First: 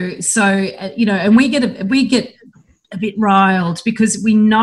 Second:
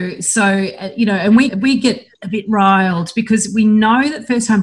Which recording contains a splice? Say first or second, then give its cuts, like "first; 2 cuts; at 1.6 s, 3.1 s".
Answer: second; 2 cuts; at 1.5 s, 2.1 s